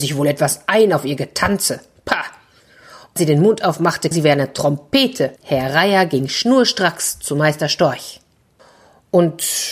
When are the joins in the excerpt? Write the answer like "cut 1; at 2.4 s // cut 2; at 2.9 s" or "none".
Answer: cut 1; at 3.2 s // cut 2; at 4.1 s // cut 3; at 5.4 s